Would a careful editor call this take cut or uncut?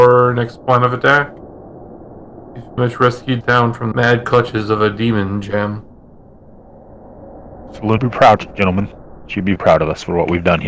cut